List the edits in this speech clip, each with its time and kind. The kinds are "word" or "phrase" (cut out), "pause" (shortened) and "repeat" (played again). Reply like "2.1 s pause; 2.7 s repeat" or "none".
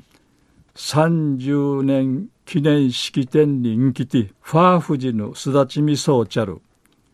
2.3 s pause; 4.3 s pause